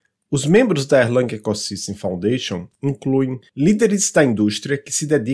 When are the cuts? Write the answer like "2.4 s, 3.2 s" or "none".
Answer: none